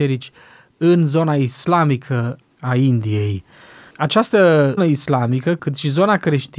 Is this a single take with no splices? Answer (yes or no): no